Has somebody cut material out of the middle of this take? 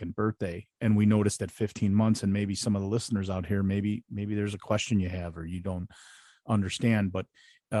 no; 0 cuts

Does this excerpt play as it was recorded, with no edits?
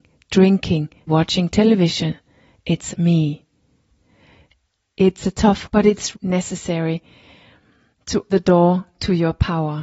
no; 5 cuts; at 1.1 s, 2.9 s, 5.6 s, 6.1 s, 8.3 s

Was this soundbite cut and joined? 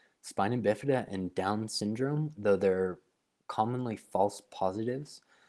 no; 0 cuts

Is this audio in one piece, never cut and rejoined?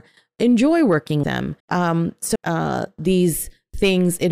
no; 3 cuts; at 1.2 s, 1.6 s, 2.4 s

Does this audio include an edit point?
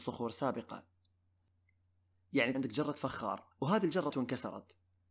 yes; 3 cuts; at 2.5 s, 3.5 s, 4.1 s

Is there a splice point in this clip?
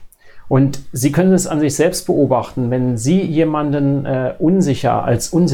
no; 0 cuts

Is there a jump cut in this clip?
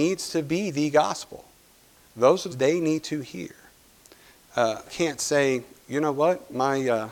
yes; 2 cuts; at 2.5 s, 4.9 s

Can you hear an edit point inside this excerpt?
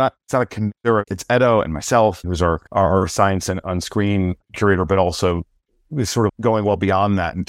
yes; 5 cuts; at 1.1 s, 2.2 s, 2.7 s, 4.4 s, 6.3 s

